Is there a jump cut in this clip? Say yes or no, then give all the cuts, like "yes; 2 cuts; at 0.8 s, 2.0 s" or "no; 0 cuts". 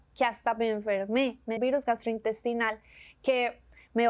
yes; 1 cut; at 1.6 s